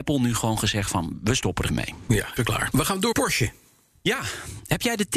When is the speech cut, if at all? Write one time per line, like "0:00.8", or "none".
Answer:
0:01.7
0:02.4
0:03.1